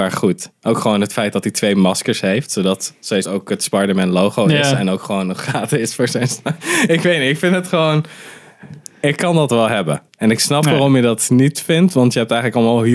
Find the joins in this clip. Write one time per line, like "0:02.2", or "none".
0:03.2
0:10.1

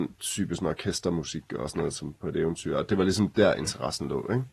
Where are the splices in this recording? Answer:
none

